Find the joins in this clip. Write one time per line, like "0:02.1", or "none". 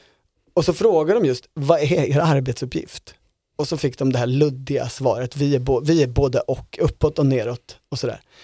none